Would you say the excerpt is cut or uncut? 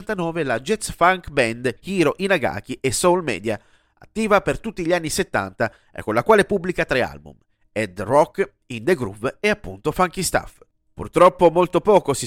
uncut